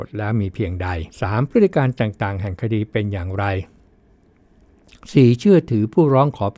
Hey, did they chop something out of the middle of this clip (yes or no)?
yes